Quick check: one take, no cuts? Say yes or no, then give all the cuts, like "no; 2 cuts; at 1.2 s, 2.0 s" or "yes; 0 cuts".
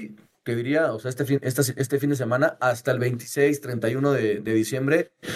yes; 0 cuts